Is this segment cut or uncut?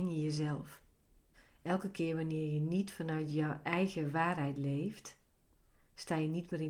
cut